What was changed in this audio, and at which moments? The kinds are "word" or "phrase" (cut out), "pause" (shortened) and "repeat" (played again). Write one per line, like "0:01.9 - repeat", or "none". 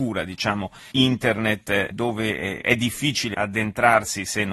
0:00.9 - word
0:01.9 - word
0:03.3 - word